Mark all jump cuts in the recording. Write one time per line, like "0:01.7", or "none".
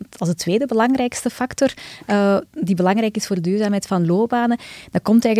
none